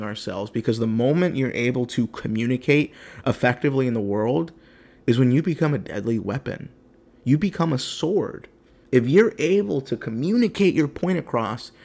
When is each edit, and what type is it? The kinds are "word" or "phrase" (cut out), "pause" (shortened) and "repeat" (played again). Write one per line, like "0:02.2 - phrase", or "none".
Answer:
none